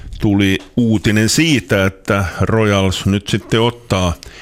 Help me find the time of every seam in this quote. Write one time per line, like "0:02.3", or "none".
none